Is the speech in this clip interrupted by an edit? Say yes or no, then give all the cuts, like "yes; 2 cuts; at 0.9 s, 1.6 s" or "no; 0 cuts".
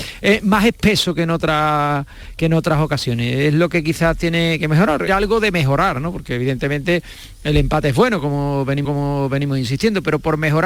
yes; 2 cuts; at 5.1 s, 8.8 s